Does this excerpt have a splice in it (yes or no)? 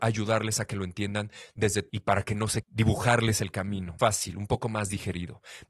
yes